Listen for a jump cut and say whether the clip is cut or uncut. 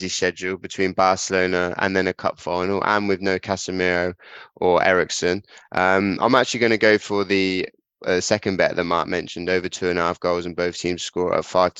uncut